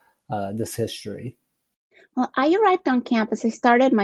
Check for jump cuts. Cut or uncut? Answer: uncut